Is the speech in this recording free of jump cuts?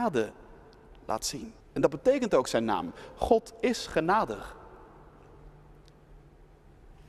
no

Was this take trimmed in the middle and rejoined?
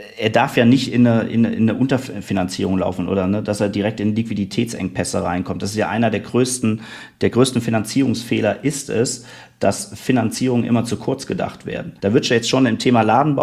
yes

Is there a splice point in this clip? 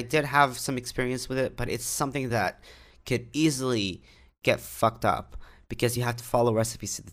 no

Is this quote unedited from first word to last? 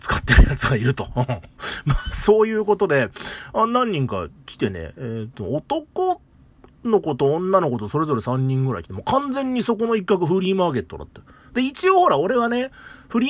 yes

